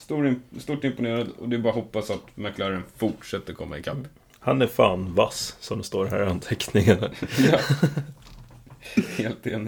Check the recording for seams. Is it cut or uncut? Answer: uncut